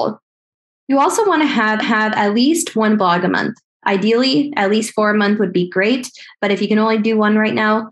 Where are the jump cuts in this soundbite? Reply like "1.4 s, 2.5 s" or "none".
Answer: 1.8 s